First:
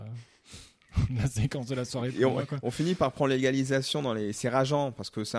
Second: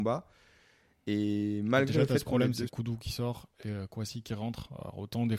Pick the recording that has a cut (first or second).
second